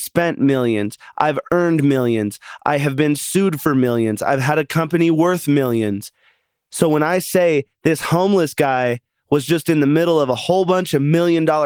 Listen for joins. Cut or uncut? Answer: uncut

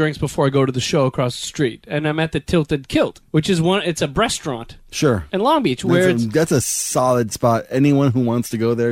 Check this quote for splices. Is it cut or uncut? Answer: cut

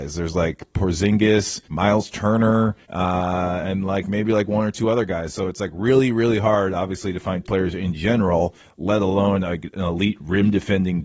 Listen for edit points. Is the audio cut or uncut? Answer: cut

